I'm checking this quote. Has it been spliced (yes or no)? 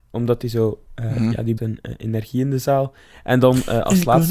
yes